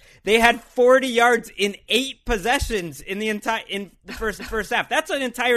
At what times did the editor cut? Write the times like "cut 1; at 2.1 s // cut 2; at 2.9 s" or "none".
cut 1; at 4.4 s